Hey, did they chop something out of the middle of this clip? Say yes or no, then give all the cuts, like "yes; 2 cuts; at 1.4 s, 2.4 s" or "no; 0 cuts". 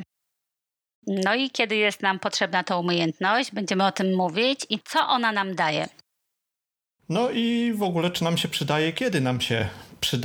no; 0 cuts